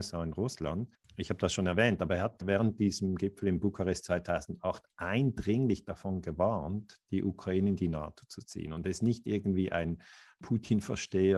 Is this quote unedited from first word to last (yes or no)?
yes